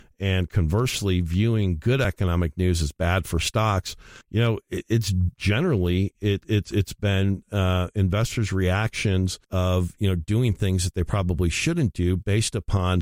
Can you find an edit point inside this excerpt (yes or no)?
yes